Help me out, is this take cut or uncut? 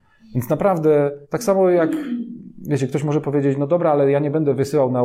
cut